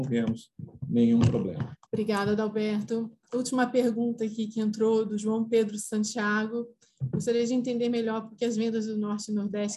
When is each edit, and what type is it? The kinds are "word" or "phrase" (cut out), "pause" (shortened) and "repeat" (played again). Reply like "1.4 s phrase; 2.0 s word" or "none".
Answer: 1.9 s pause